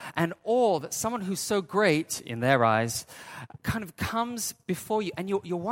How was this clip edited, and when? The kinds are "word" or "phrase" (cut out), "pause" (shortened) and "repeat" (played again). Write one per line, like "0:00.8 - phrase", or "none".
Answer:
0:03.6 - pause